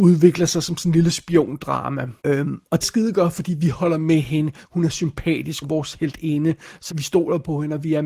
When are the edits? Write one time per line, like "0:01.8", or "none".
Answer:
0:02.2
0:02.8
0:05.6
0:06.9